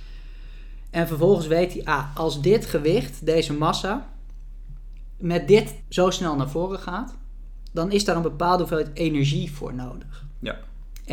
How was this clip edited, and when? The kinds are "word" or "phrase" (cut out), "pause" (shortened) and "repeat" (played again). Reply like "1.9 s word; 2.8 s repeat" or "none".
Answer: 5.8 s word